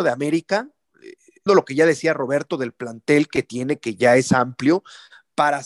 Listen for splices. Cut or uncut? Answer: cut